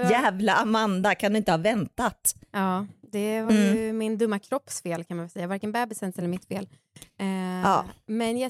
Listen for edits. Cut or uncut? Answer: uncut